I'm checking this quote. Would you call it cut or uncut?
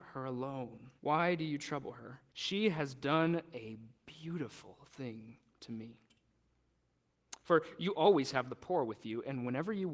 cut